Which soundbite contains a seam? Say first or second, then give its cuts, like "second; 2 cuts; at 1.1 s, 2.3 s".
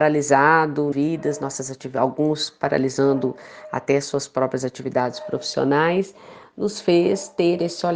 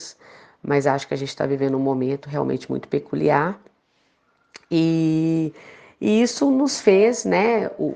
first; 1 cut; at 0.9 s